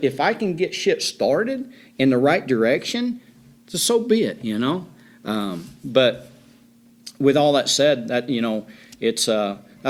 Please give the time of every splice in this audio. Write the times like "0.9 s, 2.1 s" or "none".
none